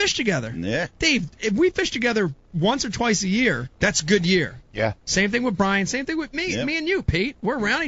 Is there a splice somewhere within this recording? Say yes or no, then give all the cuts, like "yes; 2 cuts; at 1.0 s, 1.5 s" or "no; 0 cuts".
yes; 1 cut; at 3.7 s